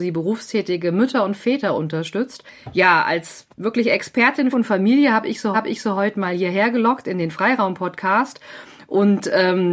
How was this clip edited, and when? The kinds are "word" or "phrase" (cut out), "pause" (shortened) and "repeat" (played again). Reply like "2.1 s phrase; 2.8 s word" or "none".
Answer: 3.5 s pause; 4.5 s phrase; 5.5 s repeat

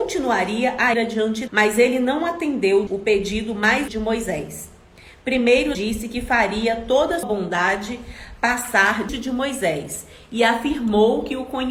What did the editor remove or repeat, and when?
0.9 s word; 1.5 s word; 2.9 s word; 3.9 s word; 5.7 s word; 7.2 s word; 9.1 s word

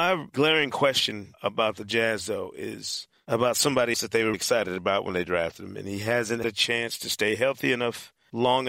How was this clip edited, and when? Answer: 3.9 s word; 4.3 s word; 6.4 s word

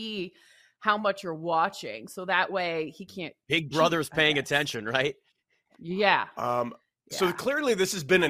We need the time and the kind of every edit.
none

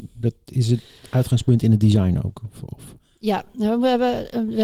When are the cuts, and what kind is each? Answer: none

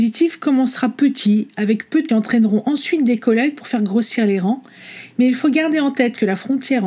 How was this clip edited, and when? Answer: 2.1 s phrase

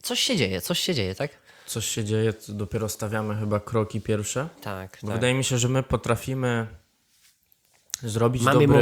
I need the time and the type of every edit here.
none

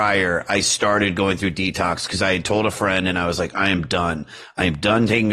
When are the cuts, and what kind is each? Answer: none

